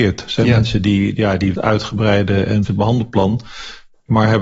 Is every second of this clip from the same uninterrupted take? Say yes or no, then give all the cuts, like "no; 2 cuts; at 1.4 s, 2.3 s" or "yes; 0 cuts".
no; 2 cuts; at 1.5 s, 2.7 s